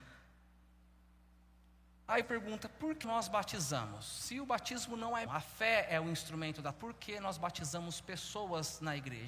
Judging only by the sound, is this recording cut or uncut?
cut